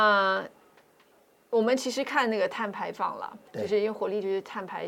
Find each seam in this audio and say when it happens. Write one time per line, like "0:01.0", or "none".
0:03.5